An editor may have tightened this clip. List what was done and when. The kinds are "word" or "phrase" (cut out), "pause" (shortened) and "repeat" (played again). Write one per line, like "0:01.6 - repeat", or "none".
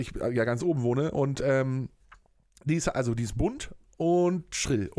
none